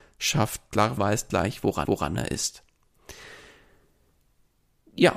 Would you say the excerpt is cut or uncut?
cut